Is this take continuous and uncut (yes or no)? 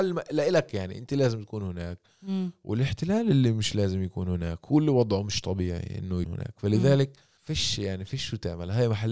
no